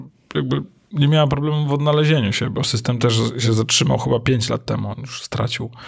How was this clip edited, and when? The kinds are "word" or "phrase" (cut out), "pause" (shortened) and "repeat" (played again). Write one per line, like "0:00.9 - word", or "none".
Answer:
none